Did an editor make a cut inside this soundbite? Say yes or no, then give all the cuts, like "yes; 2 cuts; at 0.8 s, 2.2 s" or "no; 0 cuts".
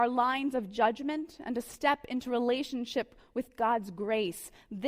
no; 0 cuts